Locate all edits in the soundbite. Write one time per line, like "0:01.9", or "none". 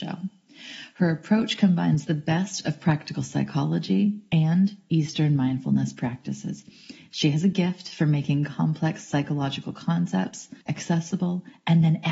0:10.6